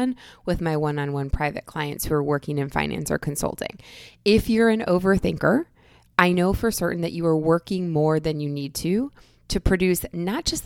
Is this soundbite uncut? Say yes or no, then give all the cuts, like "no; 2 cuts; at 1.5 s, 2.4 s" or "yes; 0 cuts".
yes; 0 cuts